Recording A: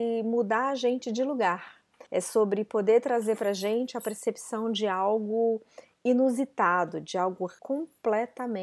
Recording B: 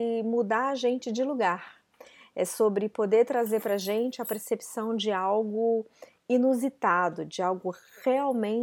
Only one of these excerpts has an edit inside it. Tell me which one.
A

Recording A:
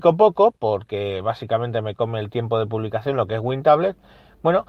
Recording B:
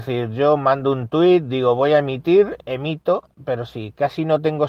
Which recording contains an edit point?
B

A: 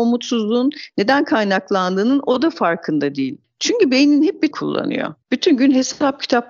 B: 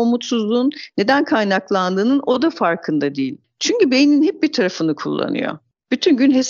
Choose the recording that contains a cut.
A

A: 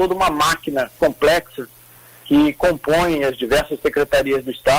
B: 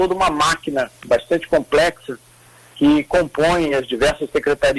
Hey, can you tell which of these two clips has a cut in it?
A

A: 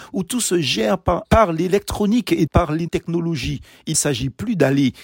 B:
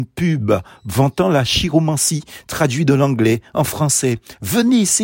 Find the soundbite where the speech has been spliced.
A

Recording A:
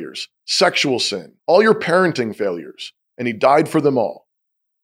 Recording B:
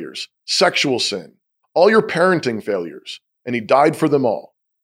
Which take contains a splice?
A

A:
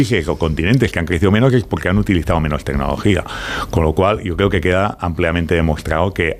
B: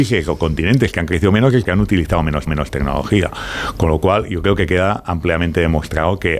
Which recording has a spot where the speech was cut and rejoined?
B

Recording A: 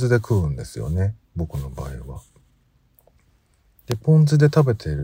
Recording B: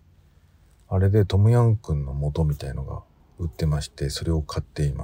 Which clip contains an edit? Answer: B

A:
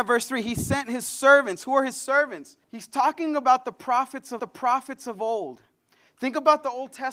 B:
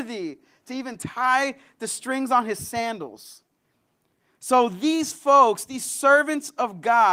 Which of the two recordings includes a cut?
A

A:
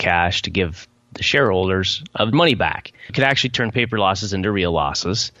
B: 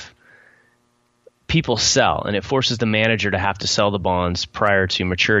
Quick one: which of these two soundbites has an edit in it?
A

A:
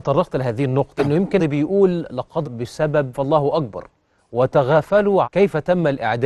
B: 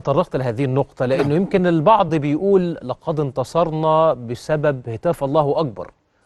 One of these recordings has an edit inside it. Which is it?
A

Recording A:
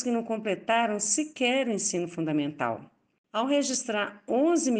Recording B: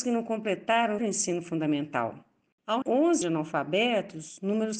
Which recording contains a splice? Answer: B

